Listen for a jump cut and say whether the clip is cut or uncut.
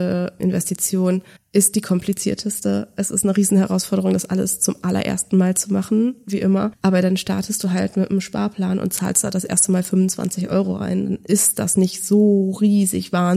cut